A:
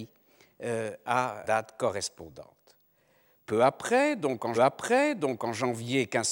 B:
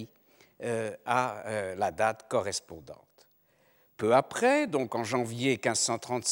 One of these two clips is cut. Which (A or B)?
A